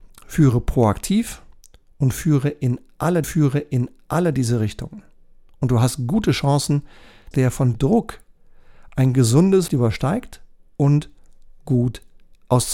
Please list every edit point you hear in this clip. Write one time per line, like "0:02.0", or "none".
0:03.2
0:07.3
0:07.7
0:09.7